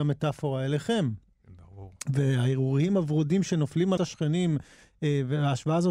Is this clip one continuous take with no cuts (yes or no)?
no